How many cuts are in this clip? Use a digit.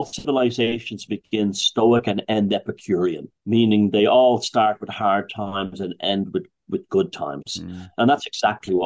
1